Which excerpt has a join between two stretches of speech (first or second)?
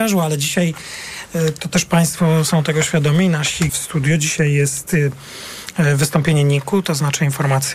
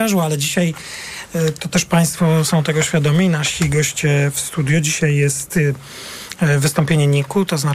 first